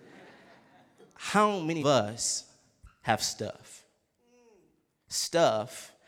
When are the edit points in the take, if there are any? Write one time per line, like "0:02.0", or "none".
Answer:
0:01.8